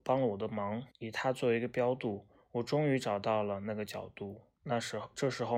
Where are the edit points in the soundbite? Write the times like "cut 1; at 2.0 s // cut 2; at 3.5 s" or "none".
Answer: cut 1; at 0.9 s // cut 2; at 4.6 s